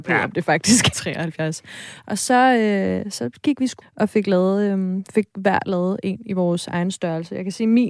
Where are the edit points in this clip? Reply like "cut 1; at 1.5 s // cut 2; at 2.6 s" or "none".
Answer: cut 1; at 0.9 s // cut 2; at 3.8 s